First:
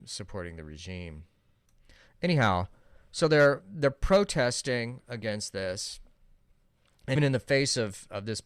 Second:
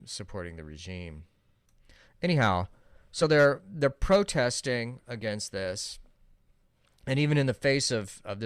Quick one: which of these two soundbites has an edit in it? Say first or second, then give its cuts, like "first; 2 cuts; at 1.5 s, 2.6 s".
first; 1 cut; at 7.2 s